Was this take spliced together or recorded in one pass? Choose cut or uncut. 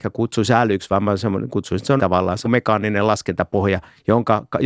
cut